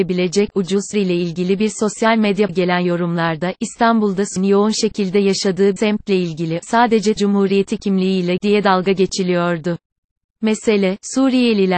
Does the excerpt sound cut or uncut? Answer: cut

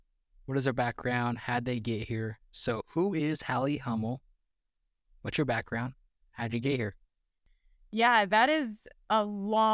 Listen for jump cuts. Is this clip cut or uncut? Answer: uncut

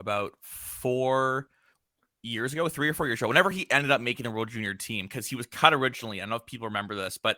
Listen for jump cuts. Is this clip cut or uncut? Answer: uncut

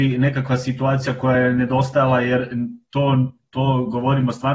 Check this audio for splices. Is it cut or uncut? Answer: uncut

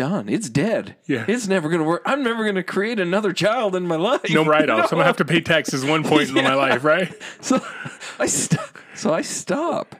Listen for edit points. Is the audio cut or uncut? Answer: cut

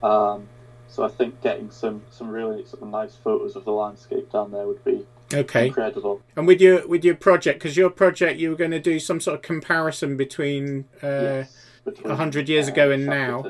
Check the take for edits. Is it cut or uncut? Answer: cut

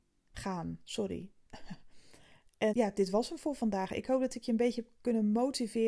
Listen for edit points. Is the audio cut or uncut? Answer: cut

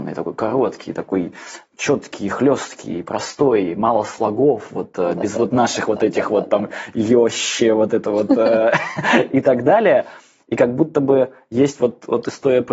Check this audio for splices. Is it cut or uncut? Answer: uncut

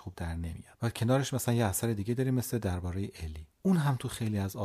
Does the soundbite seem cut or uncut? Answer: cut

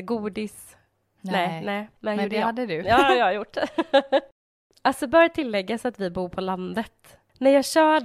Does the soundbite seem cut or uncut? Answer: cut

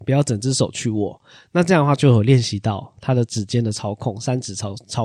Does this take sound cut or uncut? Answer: uncut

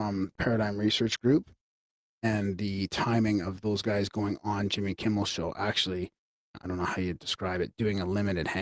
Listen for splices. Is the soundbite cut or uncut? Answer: cut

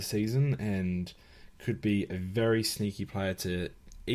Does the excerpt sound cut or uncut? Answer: uncut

